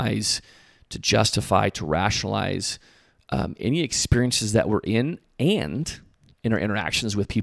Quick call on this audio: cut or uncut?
uncut